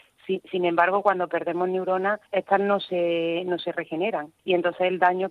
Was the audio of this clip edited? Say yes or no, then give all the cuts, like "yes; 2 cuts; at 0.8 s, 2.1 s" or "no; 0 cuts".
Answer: yes; 2 cuts; at 2.3 s, 4.4 s